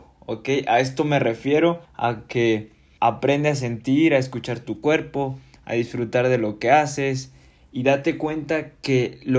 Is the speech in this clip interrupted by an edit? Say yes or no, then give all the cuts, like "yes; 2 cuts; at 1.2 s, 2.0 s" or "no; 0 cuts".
yes; 2 cuts; at 1.8 s, 3.0 s